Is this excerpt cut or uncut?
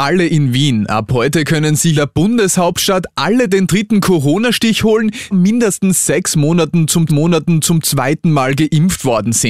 cut